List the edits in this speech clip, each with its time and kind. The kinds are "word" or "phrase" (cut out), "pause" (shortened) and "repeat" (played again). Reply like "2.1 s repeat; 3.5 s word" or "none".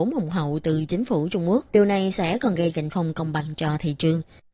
1.7 s pause; 2.9 s word

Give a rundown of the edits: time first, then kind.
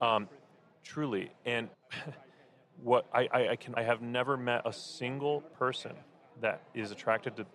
1.7 s pause; 3.8 s phrase

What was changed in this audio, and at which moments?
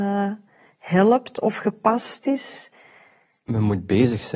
none

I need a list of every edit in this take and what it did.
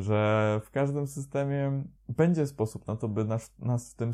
2.0 s pause

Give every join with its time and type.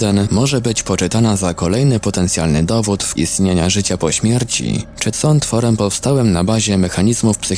3.2 s word; 5.1 s word

